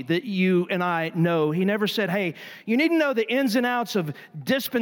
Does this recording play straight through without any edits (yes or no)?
yes